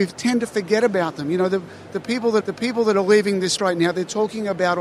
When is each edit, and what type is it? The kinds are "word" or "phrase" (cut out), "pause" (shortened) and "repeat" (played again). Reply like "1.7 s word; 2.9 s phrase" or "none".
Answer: 2.4 s repeat; 3.6 s word

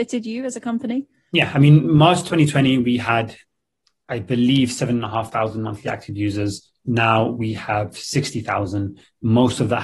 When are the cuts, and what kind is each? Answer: none

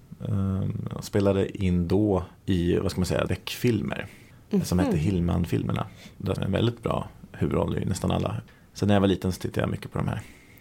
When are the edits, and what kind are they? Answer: 2.4 s pause; 3.3 s word; 6.4 s phrase

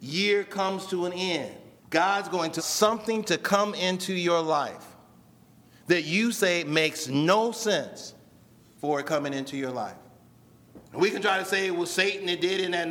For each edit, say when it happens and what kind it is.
1.8 s pause; 2.6 s word; 10.9 s pause

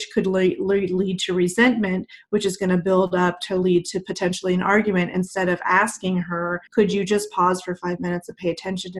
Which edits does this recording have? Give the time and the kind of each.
6.7 s pause

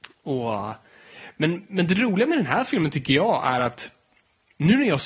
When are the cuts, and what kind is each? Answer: none

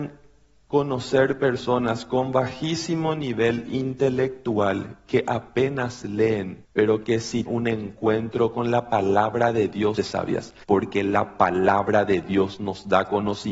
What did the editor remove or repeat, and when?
6.6 s pause; 7.5 s word; 10.0 s phrase; 10.6 s pause

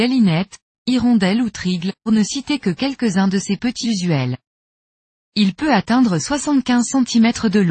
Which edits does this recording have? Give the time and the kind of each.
2.1 s word; 3.8 s word

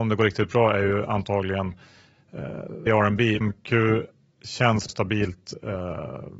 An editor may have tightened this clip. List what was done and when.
2.9 s word; 3.4 s word; 4.9 s word

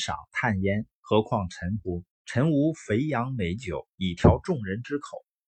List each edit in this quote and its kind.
1.0 s pause; 2.1 s pause; 3.9 s pause

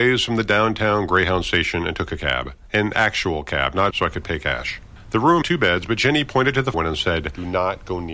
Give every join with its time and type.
3.9 s word; 5.4 s word; 6.7 s word

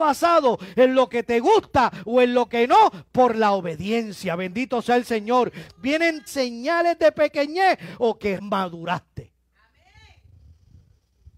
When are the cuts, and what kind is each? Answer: 6.3 s phrase; 8.4 s word

